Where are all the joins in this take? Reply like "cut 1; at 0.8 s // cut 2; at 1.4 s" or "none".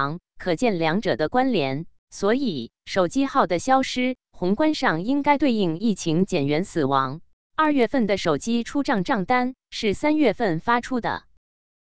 cut 1; at 2.0 s // cut 2; at 7.4 s